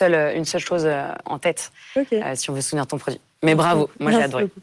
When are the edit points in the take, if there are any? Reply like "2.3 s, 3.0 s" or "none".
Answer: 1.2 s

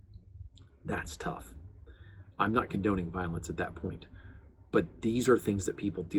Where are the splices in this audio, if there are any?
none

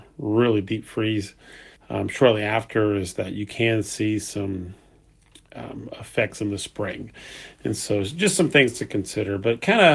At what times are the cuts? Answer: 1.8 s

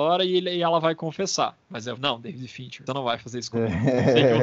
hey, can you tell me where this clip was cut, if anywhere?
1.6 s, 2.0 s, 2.9 s

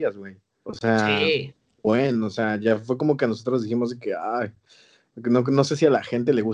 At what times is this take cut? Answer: none

